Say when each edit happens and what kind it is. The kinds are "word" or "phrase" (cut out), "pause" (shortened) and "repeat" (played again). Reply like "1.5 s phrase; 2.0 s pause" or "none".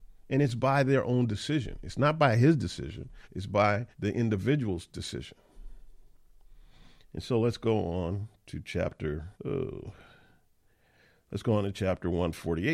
3.2 s pause; 3.9 s pause; 9.3 s pause